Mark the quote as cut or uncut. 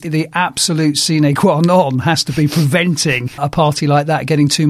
uncut